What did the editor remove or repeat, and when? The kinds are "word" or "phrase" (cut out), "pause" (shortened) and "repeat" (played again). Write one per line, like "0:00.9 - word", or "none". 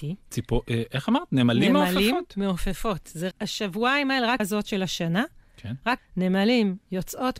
0:03.3 - word
0:04.4 - word
0:06.0 - word